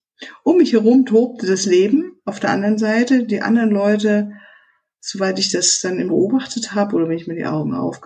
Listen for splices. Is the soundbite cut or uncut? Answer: cut